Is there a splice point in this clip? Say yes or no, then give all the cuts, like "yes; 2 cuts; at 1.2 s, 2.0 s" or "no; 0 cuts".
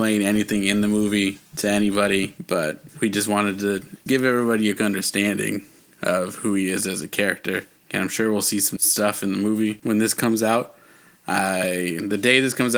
yes; 3 cuts; at 4.1 s, 4.8 s, 8.8 s